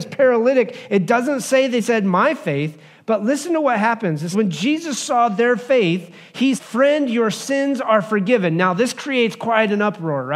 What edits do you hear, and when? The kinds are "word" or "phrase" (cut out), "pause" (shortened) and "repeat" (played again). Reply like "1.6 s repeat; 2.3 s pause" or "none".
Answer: 1.8 s word; 4.3 s word; 6.6 s word